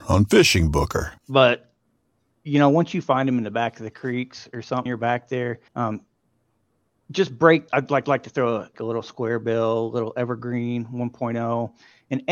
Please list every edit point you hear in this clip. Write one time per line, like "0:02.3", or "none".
0:01.2
0:04.9
0:05.7
0:07.7
0:08.0
0:08.7